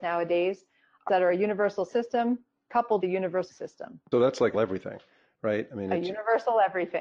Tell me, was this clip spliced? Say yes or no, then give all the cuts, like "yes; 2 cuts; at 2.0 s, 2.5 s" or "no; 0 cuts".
yes; 6 cuts; at 1.1 s, 1.9 s, 3.0 s, 3.5 s, 4.1 s, 4.5 s